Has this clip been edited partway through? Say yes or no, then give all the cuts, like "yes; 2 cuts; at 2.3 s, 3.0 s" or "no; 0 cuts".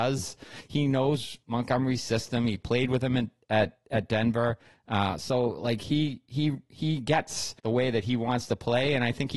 yes; 2 cuts; at 1.4 s, 7.6 s